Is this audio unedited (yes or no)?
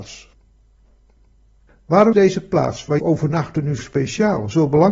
no